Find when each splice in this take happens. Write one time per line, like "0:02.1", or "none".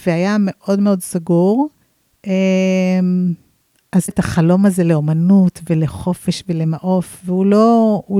0:01.8
0:04.1